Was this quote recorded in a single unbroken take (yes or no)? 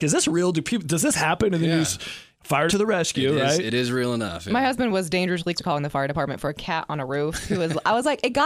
no